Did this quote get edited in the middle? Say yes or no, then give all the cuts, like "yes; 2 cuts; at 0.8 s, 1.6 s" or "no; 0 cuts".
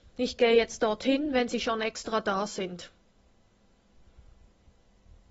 no; 0 cuts